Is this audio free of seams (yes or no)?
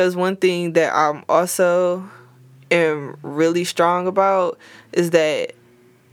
yes